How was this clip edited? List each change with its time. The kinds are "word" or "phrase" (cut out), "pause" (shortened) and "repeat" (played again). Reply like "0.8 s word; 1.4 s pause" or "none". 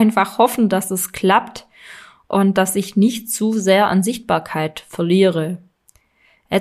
none